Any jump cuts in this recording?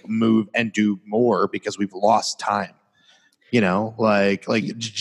no; 0 cuts

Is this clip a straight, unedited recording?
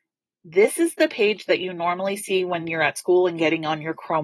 yes; 0 cuts

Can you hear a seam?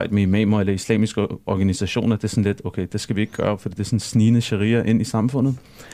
no; 0 cuts

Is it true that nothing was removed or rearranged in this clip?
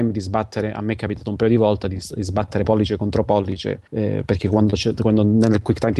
no; 1 cut; at 3.9 s

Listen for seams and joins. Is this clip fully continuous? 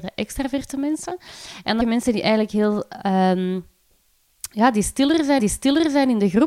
no; 2 cuts; at 1.8 s, 5.4 s

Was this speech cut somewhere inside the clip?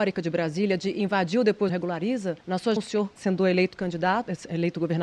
yes; 4 cuts; at 1.7 s, 2.4 s, 2.8 s, 3.2 s

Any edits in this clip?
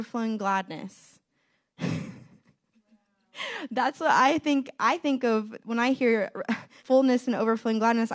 yes; 1 cut; at 6.8 s

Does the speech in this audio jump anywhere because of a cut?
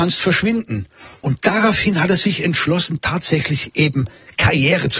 no; 0 cuts

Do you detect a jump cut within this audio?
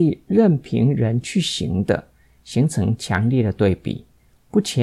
no; 0 cuts

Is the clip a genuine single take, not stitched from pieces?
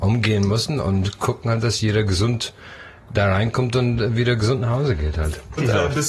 yes; 0 cuts

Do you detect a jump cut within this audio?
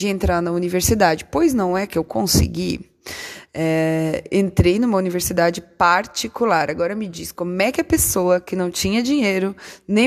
no; 0 cuts

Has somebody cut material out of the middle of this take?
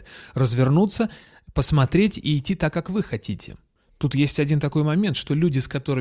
no; 0 cuts

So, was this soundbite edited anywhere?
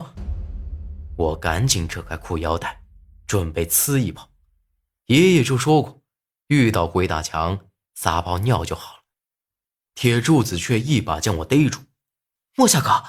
no; 0 cuts

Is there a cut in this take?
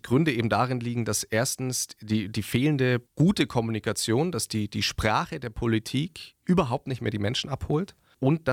yes; 1 cut; at 3.1 s

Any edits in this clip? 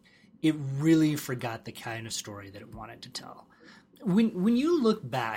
no; 0 cuts

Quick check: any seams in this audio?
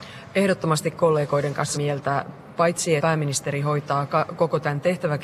yes; 2 cuts; at 1.7 s, 3.0 s

